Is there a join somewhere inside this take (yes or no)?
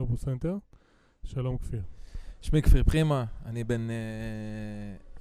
no